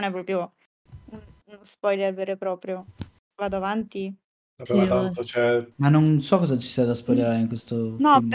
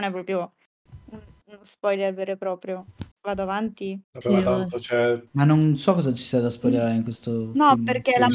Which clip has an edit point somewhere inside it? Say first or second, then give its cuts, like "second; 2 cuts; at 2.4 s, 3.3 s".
second; 2 cuts; at 3.1 s, 4.0 s